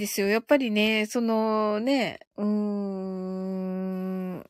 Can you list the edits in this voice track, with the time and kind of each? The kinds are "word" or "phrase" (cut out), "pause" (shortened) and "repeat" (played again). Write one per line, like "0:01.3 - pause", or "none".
0:02.3 - pause

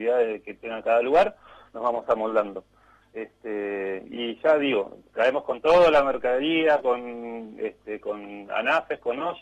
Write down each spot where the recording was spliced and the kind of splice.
none

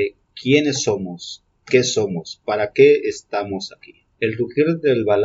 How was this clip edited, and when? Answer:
0:04.1 - pause

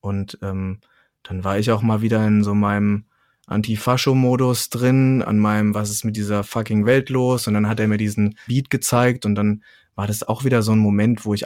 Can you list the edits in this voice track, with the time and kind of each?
0:08.5 - word

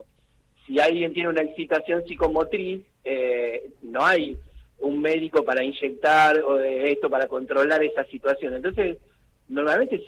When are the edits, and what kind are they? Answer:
0:02.9 - pause

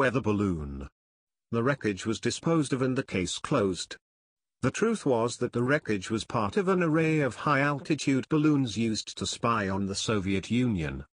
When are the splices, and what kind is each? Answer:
none

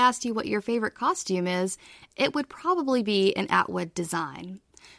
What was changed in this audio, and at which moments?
none

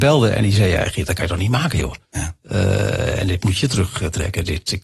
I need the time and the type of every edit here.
0:02.0 - pause

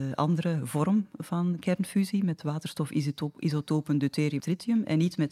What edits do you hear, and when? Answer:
0:04.4 - word

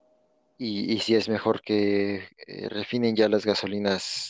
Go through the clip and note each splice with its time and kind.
none

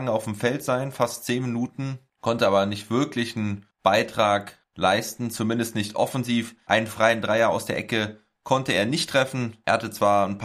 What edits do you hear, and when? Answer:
none

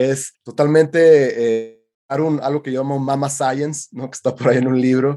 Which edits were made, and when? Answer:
none

